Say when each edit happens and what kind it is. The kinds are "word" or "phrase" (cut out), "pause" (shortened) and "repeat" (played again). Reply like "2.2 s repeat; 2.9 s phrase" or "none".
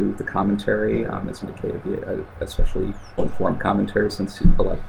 1.4 s word; 1.8 s word; 3.2 s word